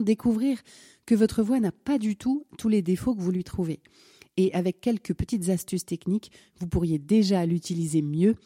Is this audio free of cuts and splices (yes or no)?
yes